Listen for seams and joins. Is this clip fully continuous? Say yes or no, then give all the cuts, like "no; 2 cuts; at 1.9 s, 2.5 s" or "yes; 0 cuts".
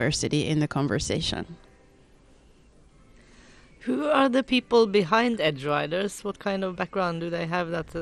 yes; 0 cuts